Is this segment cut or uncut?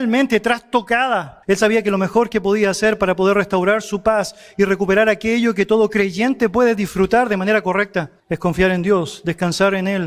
cut